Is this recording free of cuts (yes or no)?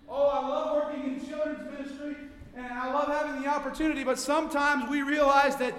yes